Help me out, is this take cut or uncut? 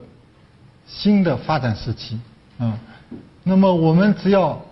uncut